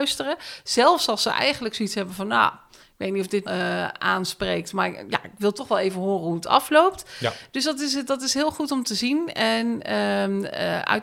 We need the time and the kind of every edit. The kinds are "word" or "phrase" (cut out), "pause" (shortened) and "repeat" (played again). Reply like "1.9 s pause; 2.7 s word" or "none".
3.4 s phrase